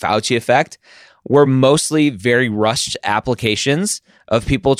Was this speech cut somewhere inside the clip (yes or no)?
no